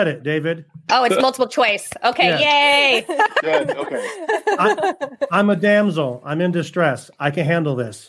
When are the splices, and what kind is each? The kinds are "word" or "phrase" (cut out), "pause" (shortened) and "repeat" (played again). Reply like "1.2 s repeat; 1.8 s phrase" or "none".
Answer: none